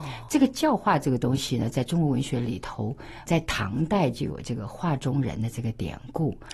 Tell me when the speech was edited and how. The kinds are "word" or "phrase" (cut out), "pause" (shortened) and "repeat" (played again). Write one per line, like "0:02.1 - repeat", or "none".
0:03.3 - word